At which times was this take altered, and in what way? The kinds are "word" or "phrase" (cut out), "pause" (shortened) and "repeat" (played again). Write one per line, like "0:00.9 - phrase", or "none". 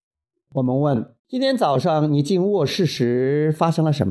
0:01.2 - pause